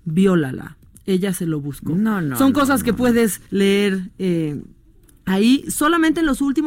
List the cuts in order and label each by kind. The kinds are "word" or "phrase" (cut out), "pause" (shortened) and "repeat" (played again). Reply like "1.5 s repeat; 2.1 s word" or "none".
3.5 s pause